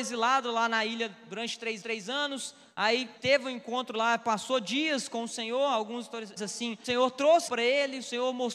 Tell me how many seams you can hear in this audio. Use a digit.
5